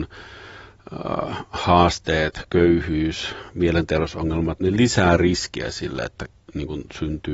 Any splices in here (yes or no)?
yes